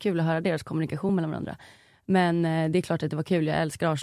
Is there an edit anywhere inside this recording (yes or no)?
no